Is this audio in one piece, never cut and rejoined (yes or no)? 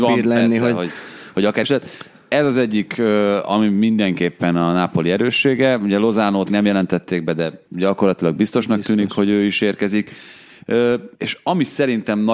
no